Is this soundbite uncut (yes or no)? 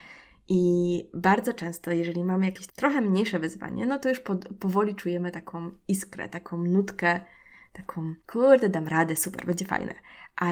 no